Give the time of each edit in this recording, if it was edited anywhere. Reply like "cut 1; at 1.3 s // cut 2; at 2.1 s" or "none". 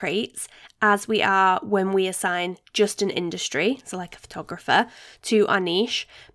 none